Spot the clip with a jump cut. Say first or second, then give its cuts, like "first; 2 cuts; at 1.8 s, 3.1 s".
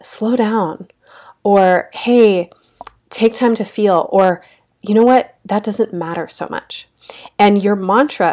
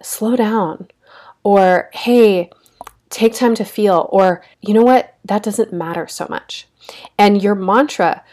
second; 1 cut; at 4.5 s